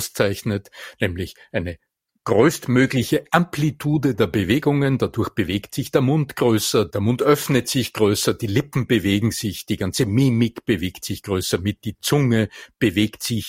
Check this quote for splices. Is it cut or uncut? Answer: uncut